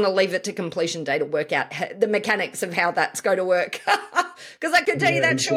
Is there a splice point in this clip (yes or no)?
no